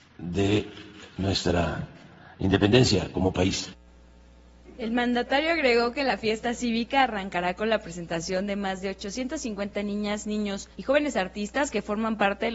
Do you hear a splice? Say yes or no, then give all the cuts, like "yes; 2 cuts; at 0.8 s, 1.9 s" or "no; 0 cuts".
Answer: yes; 1 cut; at 10.7 s